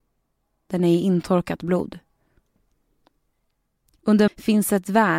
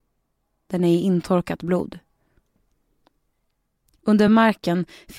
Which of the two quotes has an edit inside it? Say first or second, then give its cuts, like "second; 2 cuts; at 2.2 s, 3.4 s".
first; 1 cut; at 4.3 s